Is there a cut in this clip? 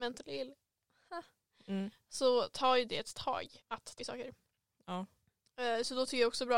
yes; 2 cuts; at 3.6 s, 4.0 s

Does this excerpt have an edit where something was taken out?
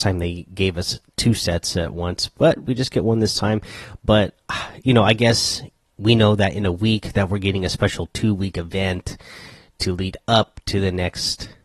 no; 0 cuts

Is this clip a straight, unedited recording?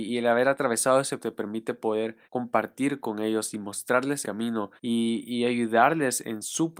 no; 4 cuts; at 1.2 s, 2.2 s, 4.2 s, 4.8 s

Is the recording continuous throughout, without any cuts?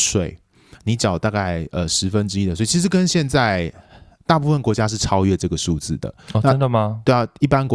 yes; 0 cuts

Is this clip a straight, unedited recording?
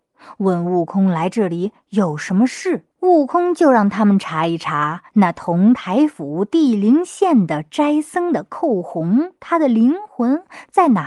no; 2 cuts; at 2.9 s, 5.1 s

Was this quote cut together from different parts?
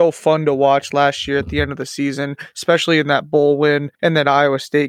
yes; 1 cut; at 3.9 s

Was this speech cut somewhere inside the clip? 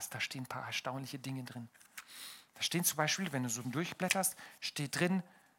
yes; 1 cut; at 3.6 s

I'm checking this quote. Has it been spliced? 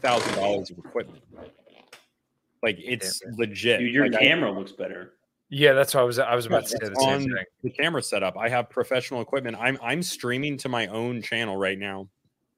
no; 0 cuts

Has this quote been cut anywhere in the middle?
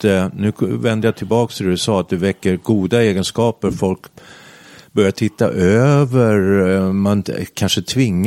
no; 0 cuts

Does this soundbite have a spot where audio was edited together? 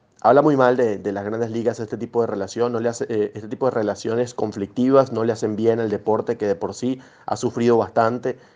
no; 0 cuts

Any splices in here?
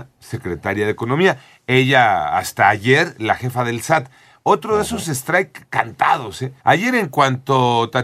yes; 1 cut; at 6.6 s

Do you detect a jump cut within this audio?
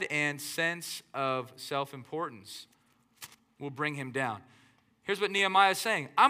no; 0 cuts

